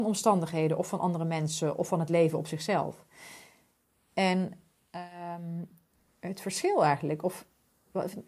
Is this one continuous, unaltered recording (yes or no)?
yes